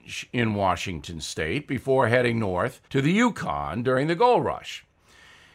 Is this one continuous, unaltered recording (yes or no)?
no